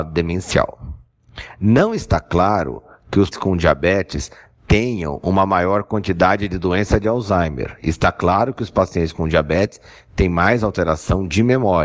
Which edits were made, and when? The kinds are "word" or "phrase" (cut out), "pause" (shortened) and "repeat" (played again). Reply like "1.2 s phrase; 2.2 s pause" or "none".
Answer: 3.3 s word